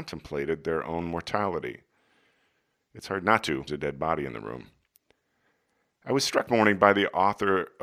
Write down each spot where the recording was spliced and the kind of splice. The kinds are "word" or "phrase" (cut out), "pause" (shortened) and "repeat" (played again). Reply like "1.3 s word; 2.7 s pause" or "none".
3.7 s phrase; 6.5 s word